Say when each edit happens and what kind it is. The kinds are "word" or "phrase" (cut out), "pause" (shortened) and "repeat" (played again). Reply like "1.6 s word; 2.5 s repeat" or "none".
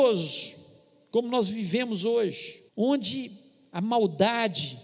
2.7 s pause